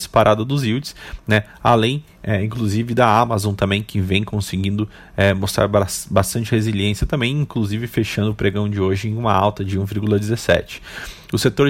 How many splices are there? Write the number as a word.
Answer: zero